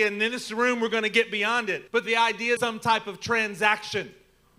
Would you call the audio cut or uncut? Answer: cut